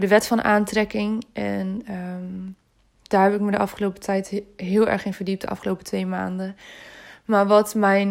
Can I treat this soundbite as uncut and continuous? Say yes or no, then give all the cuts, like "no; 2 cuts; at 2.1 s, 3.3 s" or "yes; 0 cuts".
yes; 0 cuts